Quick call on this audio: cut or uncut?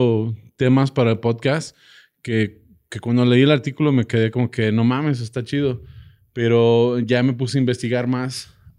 uncut